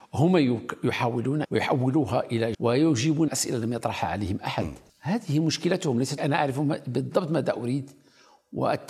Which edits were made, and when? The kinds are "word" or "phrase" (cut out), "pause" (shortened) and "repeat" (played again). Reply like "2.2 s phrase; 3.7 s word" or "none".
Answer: 1.4 s phrase; 2.5 s word; 3.3 s word; 4.9 s pause; 6.2 s word